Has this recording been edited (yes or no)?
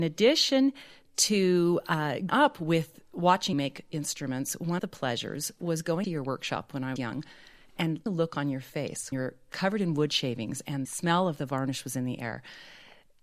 yes